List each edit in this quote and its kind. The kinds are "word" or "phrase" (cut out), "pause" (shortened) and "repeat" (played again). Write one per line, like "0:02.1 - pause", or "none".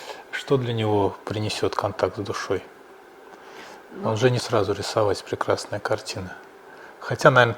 0:04.4 - word